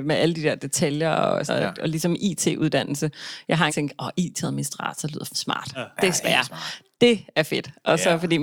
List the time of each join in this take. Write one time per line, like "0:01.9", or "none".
0:01.5
0:03.7
0:05.3
0:06.2